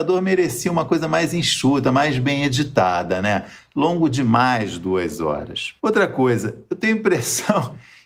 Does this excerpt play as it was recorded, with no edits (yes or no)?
no